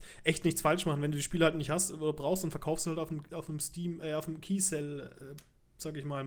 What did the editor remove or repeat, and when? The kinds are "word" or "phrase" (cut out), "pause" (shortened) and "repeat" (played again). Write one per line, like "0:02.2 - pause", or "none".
none